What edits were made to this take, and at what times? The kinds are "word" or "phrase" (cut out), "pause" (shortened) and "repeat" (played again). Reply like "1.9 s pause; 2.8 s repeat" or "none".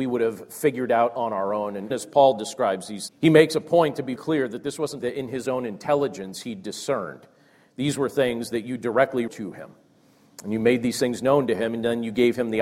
1.9 s word; 3.1 s word; 4.2 s word; 5.0 s word; 9.3 s word